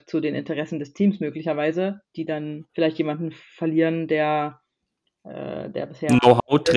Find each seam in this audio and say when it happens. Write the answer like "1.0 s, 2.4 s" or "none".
2.1 s, 2.7 s